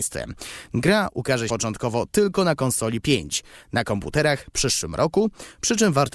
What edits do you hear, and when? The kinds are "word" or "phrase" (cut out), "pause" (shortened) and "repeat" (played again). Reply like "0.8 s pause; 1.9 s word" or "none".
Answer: 1.5 s word; 3.0 s word; 4.5 s phrase

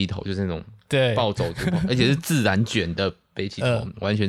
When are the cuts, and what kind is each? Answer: none

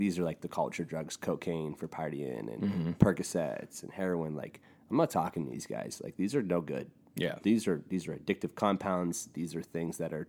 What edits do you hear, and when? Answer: none

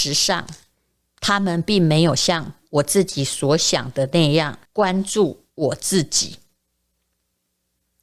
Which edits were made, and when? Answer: 4.6 s pause; 5.5 s pause

